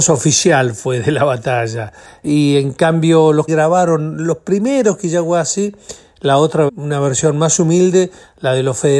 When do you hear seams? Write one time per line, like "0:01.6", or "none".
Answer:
0:03.5
0:06.7